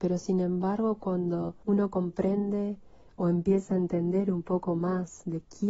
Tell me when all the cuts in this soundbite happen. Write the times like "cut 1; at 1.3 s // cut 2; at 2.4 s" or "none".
cut 1; at 1.6 s